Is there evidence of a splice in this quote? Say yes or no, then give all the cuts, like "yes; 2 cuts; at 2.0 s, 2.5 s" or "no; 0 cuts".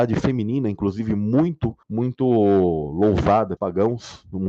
yes; 2 cuts; at 1.8 s, 3.6 s